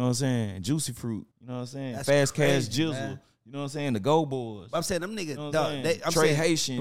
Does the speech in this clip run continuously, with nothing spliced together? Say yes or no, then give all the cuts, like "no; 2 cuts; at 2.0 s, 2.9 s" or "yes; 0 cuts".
no; 1 cut; at 1.3 s